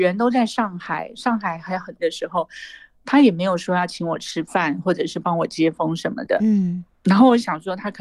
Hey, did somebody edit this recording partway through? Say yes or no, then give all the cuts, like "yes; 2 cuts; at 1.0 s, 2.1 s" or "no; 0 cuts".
yes; 1 cut; at 2.0 s